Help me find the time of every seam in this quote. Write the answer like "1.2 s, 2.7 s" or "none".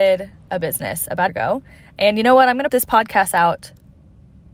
1.3 s, 2.7 s